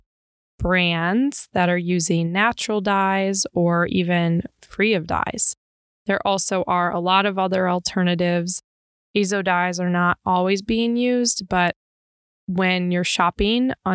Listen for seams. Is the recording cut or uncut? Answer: uncut